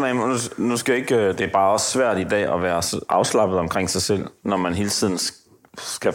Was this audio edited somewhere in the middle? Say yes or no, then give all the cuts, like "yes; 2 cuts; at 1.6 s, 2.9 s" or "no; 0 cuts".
yes; 1 cut; at 4.4 s